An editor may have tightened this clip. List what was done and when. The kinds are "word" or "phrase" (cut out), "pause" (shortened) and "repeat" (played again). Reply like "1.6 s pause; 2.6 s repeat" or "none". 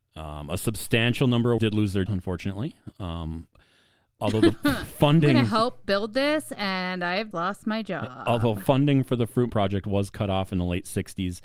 1.6 s word; 2.1 s word; 7.3 s word; 9.5 s word